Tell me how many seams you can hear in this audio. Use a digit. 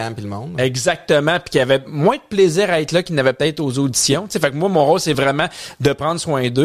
0